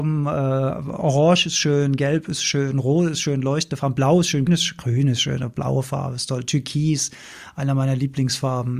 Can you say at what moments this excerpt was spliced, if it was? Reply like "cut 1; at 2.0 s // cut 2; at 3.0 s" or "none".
cut 1; at 4.5 s